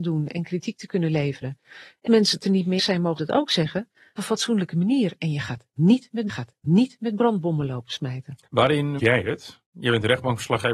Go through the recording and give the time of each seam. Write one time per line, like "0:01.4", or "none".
0:02.1
0:02.8
0:03.2
0:04.2
0:06.3
0:09.0